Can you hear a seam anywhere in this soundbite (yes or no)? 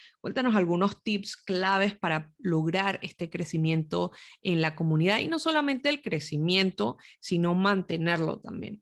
no